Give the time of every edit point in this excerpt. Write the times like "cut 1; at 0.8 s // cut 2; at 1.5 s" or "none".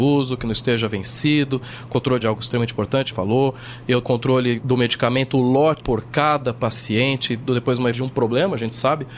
cut 1; at 2.2 s // cut 2; at 3.1 s // cut 3; at 4.0 s // cut 4; at 4.6 s // cut 5; at 5.8 s // cut 6; at 7.5 s // cut 7; at 7.9 s